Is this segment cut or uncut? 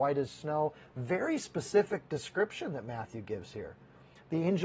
uncut